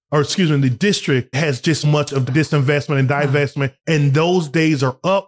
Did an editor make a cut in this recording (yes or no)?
yes